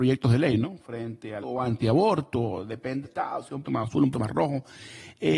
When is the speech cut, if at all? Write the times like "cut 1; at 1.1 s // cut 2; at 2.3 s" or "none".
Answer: cut 1; at 1.4 s // cut 2; at 3.0 s // cut 3; at 3.6 s // cut 4; at 4.1 s